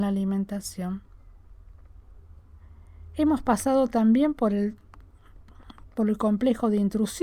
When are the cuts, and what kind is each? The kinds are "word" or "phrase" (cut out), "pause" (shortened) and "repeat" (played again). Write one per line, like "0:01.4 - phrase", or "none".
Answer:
none